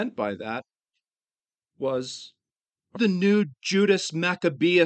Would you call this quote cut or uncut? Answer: cut